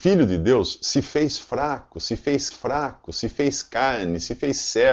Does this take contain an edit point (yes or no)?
yes